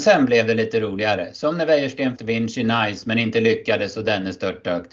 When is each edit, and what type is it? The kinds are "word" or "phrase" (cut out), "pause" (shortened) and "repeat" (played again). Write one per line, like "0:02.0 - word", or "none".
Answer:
0:02.2 - phrase